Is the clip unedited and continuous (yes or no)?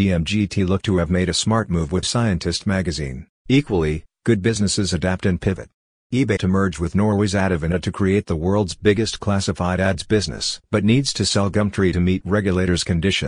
no